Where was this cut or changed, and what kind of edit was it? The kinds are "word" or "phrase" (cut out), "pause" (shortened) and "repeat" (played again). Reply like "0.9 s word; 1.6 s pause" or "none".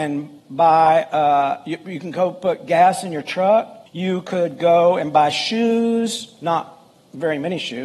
3.9 s pause